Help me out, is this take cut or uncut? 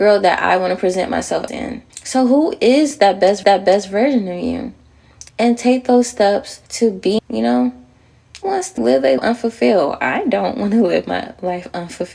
cut